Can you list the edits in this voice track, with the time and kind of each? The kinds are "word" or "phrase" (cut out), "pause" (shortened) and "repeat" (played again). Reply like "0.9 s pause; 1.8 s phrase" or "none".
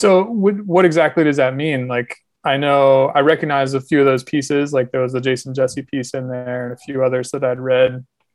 none